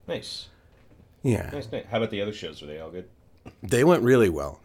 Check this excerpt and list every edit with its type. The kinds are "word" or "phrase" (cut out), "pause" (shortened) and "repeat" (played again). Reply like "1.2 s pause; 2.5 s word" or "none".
3.1 s pause